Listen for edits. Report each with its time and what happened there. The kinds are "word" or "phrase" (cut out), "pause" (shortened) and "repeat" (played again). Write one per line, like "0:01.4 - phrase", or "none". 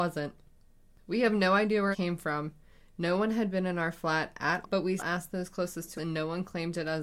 0:01.9 - word
0:04.6 - word
0:05.0 - word
0:06.0 - word